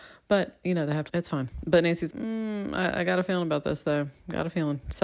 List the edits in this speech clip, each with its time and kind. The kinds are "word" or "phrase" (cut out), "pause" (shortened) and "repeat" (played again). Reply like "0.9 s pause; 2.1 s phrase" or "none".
1.1 s phrase; 2.1 s word